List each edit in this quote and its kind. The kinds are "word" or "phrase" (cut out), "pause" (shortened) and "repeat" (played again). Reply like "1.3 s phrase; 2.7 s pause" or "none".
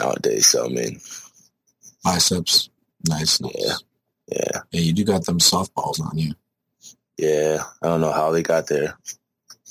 none